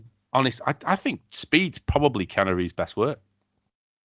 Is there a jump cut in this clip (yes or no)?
no